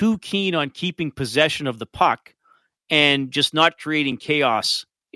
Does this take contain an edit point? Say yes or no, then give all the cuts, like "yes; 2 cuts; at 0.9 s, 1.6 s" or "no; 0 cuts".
no; 0 cuts